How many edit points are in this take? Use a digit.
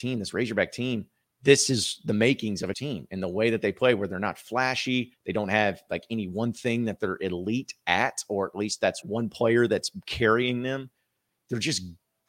4